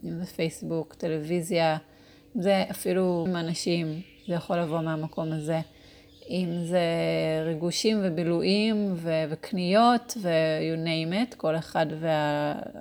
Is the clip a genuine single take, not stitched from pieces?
no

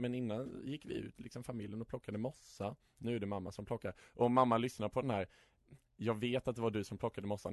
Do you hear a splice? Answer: no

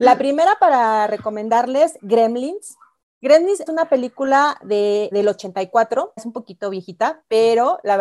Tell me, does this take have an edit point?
yes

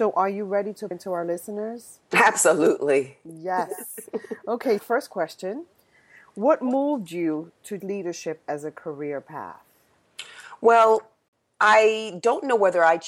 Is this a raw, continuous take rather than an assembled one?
no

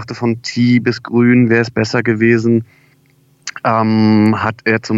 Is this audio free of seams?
yes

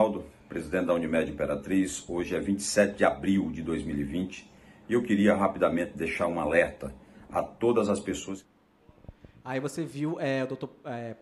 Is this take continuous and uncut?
yes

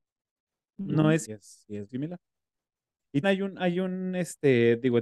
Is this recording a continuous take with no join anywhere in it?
no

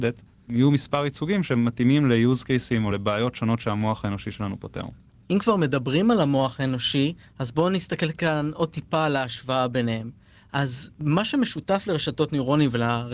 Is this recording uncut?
yes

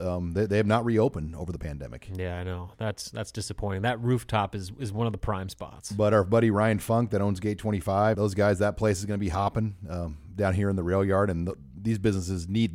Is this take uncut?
no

